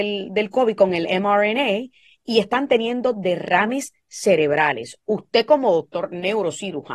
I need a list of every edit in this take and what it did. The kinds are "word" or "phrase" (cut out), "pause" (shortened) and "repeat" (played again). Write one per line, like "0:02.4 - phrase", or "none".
none